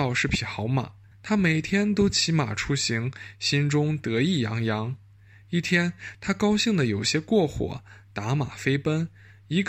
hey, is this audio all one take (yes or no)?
no